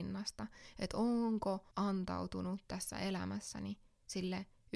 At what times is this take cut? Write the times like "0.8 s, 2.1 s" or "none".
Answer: 1.7 s